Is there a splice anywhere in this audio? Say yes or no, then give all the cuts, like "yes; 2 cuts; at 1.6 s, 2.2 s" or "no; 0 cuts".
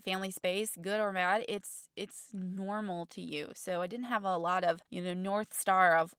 yes; 1 cut; at 4.8 s